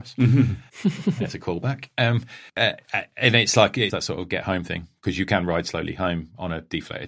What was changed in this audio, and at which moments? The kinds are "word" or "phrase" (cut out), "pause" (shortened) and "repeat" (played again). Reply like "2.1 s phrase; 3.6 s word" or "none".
2.5 s pause; 3.9 s word